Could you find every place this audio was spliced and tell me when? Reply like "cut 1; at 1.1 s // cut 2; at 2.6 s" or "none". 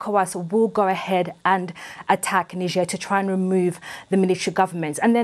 none